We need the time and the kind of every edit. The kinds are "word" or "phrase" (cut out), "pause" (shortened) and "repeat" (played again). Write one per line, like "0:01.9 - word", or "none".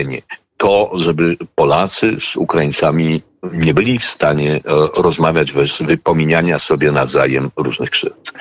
none